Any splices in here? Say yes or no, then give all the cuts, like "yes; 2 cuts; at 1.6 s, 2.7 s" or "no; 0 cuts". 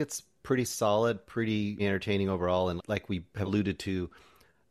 yes; 3 cuts; at 1.8 s, 2.8 s, 3.5 s